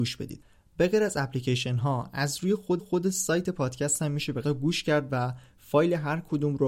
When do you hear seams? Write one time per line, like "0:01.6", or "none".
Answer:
0:02.8
0:04.4